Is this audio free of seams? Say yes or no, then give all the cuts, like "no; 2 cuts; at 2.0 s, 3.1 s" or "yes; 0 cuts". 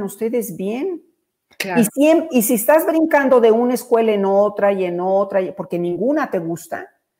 no; 1 cut; at 1.9 s